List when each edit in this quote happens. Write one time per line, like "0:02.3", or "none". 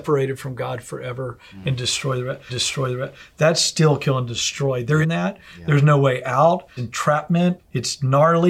0:02.5
0:05.0
0:06.8
0:07.6